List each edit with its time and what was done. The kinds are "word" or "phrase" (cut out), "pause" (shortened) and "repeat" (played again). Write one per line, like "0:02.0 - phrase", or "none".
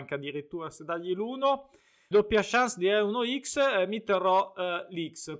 0:02.1 - word